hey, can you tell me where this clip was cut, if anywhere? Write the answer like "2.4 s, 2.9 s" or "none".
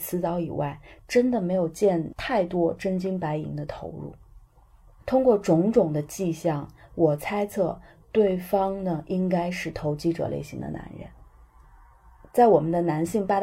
none